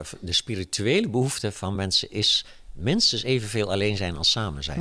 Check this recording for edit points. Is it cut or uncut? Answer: uncut